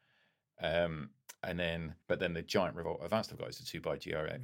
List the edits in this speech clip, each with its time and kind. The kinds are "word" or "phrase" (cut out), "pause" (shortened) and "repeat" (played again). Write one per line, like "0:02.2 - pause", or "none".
0:01.4 - pause
0:02.0 - pause